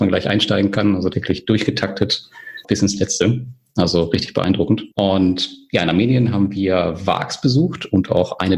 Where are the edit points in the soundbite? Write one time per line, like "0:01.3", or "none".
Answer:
0:01.1
0:02.6
0:04.9